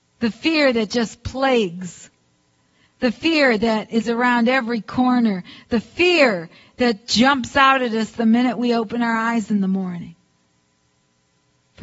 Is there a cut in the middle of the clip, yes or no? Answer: no